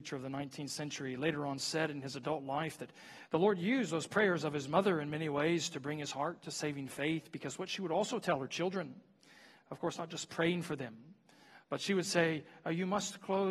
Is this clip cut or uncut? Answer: uncut